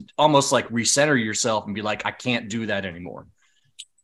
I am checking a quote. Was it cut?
no; 0 cuts

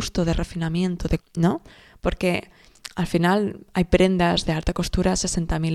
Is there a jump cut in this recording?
yes; 1 cut; at 1.2 s

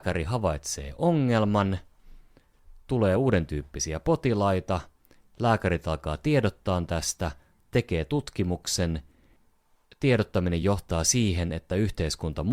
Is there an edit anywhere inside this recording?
no; 0 cuts

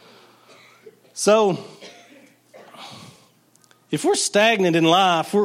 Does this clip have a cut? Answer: no; 0 cuts

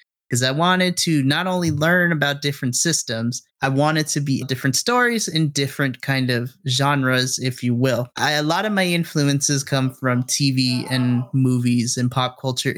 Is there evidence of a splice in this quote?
yes; 3 cuts; at 3.5 s, 4.4 s, 8.1 s

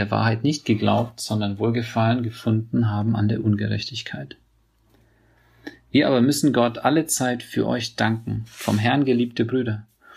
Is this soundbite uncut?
yes; 0 cuts

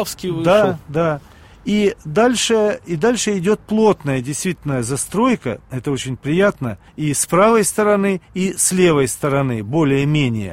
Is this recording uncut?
no; 2 cuts; at 6.9 s, 8.2 s

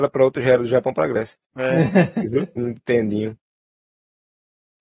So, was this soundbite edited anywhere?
yes; 2 cuts; at 1.4 s, 2.6 s

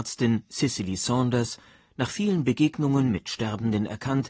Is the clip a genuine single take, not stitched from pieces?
yes; 0 cuts

